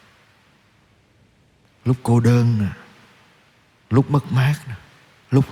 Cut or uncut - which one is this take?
uncut